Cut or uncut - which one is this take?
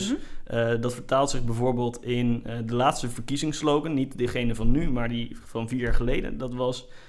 uncut